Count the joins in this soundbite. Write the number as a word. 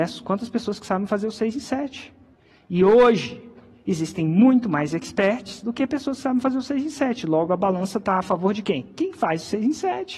zero